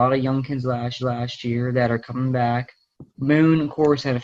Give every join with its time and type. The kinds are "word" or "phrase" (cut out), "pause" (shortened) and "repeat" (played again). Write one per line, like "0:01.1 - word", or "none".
0:01.0 - repeat
0:03.1 - pause